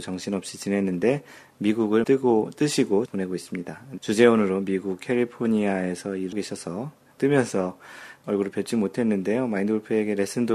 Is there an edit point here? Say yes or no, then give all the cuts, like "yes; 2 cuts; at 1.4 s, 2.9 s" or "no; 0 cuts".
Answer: yes; 6 cuts; at 2.0 s, 3.1 s, 4.0 s, 6.3 s, 7.2 s, 8.2 s